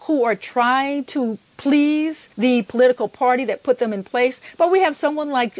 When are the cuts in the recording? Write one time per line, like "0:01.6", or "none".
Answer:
0:02.3